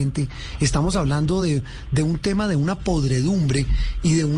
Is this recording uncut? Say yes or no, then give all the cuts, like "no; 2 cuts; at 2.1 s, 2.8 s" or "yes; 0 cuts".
yes; 0 cuts